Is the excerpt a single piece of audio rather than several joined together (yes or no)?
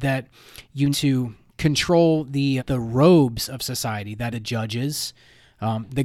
no